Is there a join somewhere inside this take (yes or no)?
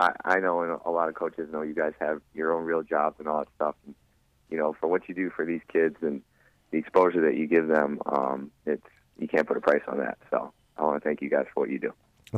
no